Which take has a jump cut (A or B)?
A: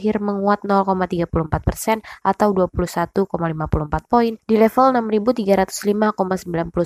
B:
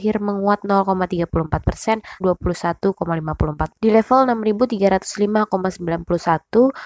B